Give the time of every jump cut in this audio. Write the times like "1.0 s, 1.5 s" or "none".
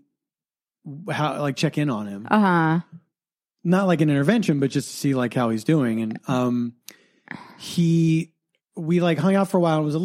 8.6 s